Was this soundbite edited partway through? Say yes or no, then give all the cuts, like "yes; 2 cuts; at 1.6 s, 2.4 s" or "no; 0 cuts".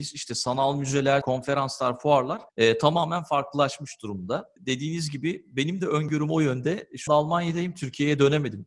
yes; 2 cuts; at 1.2 s, 7.1 s